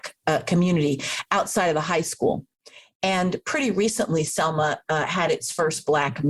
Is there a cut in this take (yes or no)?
no